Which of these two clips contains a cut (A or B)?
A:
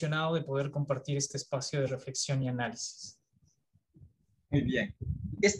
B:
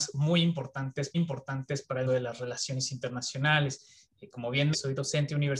B